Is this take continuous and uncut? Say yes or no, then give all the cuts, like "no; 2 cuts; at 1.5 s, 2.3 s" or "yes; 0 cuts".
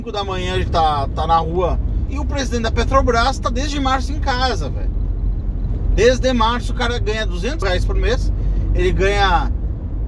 no; 2 cuts; at 2.1 s, 7.6 s